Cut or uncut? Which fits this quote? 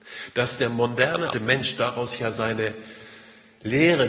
cut